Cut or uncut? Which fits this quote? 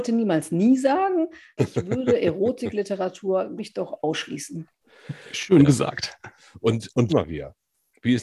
cut